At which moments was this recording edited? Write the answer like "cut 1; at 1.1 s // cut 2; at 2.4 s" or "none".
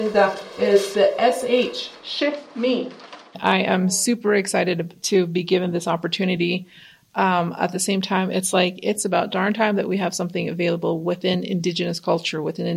none